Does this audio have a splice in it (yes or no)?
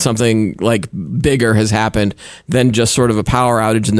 no